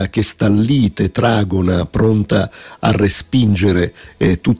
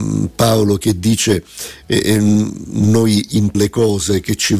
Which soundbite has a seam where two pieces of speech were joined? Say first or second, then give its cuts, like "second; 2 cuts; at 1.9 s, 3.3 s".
second; 1 cut; at 3.5 s